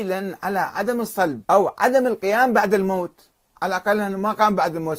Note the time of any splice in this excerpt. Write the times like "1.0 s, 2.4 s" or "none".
1.4 s